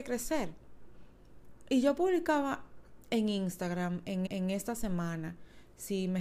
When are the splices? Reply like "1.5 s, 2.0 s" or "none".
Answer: 4.3 s